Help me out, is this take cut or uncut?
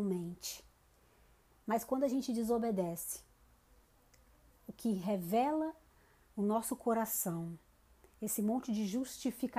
uncut